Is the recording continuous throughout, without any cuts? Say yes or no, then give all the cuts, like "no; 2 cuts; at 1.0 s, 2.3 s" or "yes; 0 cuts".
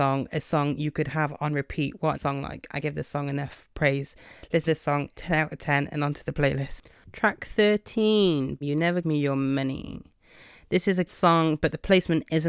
no; 7 cuts; at 2.1 s, 2.8 s, 4.7 s, 5.1 s, 8.6 s, 9.0 s, 11.1 s